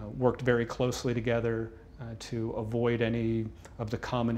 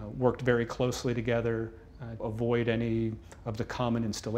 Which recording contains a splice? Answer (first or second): second